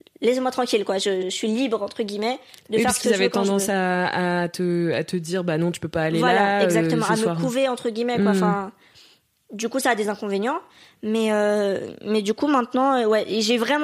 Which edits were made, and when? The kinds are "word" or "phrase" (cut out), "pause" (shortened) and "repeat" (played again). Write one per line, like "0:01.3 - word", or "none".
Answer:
0:01.2 - word
0:10.0 - phrase

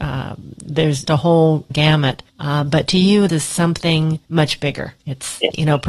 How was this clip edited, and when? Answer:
0:01.1 - word
0:01.7 - word
0:02.3 - pause
0:03.3 - word
0:04.2 - pause
0:05.0 - pause

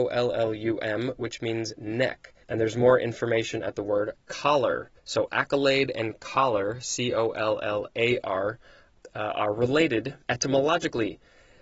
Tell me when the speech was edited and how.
0:02.4 - pause
0:05.0 - pause
0:10.2 - pause

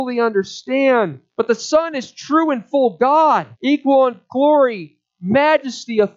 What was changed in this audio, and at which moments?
0:01.3 - pause
0:03.5 - pause

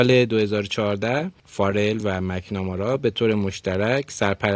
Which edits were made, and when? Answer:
none

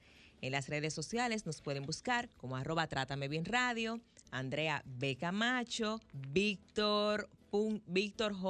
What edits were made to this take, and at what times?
0:02.3 - pause
0:06.1 - pause

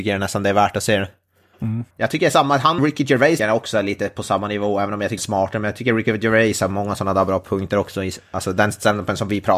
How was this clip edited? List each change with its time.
0:01.9 - pause
0:02.8 - word
0:03.4 - word
0:05.2 - phrase

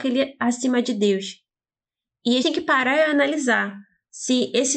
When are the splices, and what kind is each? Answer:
0:02.4 - word

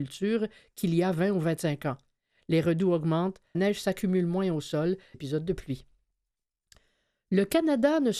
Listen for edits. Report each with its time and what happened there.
0:03.5 - word
0:05.1 - phrase

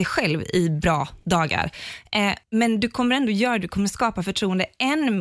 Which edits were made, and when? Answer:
0:02.4 - pause

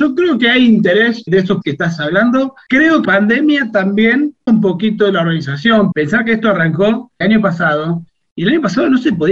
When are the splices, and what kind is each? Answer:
0:01.3 - word
0:01.6 - word
0:03.0 - word
0:04.5 - word
0:05.9 - word
0:07.2 - word

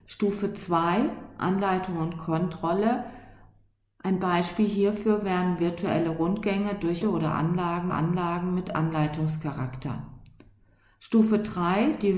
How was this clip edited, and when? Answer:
0:07.0 - word
0:07.9 - repeat

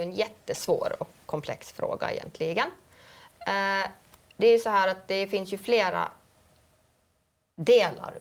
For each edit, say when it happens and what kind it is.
none

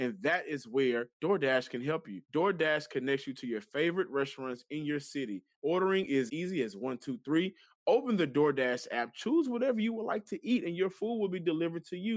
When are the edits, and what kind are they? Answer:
0:01.1 - pause
0:02.2 - pause
0:05.5 - pause
0:06.3 - word

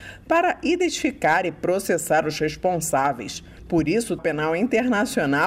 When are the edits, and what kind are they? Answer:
0:04.2 - word

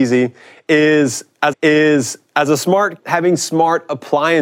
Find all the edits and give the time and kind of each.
0:01.5 - repeat
0:03.0 - word

